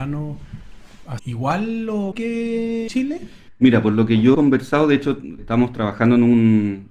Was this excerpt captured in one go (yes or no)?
no